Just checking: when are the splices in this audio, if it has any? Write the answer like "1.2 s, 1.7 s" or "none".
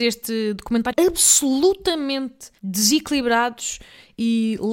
0.9 s, 2.6 s